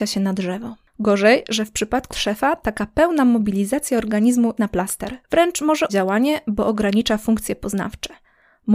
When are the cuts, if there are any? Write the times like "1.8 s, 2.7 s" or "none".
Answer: 2.1 s, 4.6 s, 5.2 s, 5.9 s